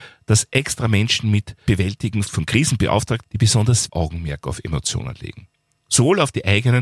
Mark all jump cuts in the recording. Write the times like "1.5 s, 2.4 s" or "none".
1.7 s, 2.3 s, 3.2 s, 3.9 s